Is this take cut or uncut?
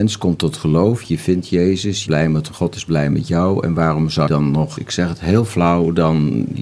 cut